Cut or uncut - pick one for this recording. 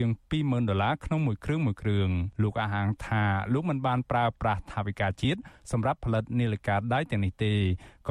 cut